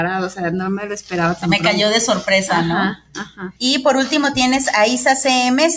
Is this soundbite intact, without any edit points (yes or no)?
no